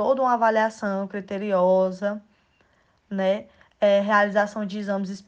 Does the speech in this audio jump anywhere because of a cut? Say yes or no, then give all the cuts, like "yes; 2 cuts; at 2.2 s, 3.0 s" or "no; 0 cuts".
no; 0 cuts